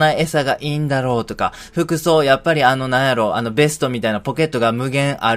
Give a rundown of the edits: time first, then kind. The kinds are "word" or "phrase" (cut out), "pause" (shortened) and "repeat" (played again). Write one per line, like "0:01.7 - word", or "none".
none